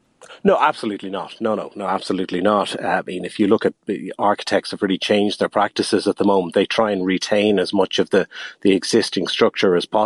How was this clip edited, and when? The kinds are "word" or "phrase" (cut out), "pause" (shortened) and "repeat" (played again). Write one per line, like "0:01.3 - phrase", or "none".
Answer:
none